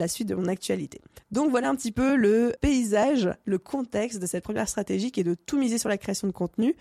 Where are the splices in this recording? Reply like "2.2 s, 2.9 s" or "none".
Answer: none